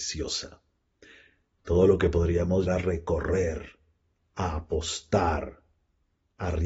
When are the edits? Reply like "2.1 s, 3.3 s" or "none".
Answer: 2.7 s